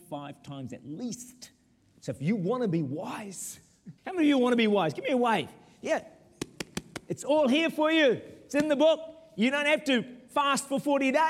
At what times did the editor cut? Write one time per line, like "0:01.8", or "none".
0:04.0